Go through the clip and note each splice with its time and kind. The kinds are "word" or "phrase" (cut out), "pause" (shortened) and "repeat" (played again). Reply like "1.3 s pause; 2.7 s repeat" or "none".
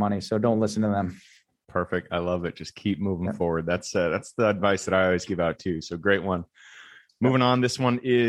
none